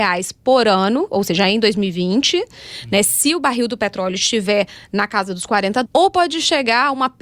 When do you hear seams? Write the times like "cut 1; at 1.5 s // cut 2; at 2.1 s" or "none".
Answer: cut 1; at 5.9 s

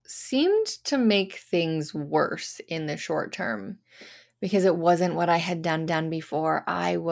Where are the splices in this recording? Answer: cut 1; at 5.9 s

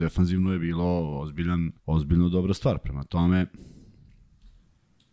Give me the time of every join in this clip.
cut 1; at 1.8 s

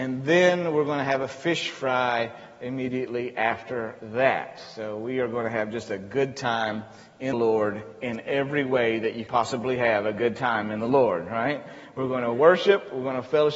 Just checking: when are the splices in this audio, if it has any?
cut 1; at 7.3 s // cut 2; at 9.3 s

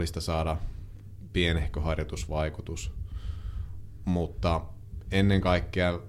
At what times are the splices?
none

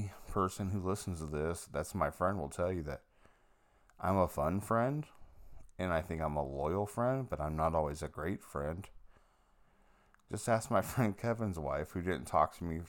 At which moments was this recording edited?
none

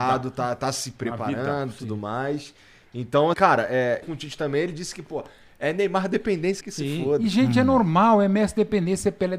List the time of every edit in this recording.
cut 1; at 3.3 s // cut 2; at 4.0 s // cut 3; at 6.6 s

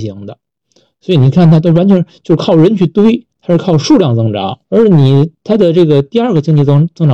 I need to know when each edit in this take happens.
cut 1; at 3.3 s // cut 2; at 4.6 s

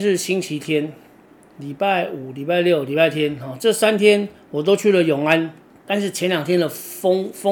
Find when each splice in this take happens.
none

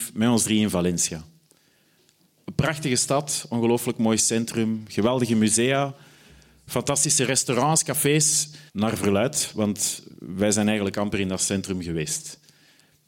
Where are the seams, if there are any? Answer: cut 1; at 8.7 s

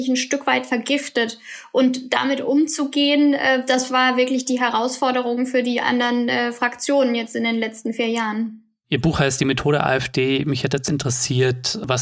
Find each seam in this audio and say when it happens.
none

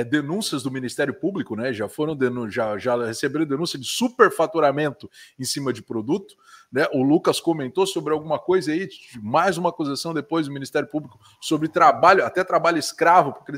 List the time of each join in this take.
none

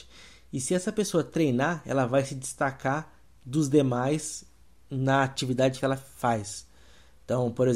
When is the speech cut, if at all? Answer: cut 1; at 5.8 s

